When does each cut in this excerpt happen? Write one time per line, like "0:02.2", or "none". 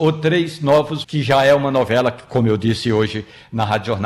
0:01.0